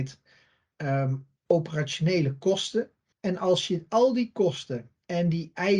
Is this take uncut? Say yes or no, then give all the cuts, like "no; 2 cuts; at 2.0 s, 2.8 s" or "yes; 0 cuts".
no; 2 cuts; at 1.4 s, 3.1 s